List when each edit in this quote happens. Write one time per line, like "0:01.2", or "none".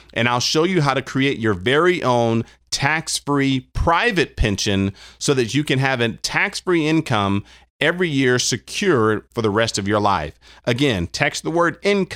none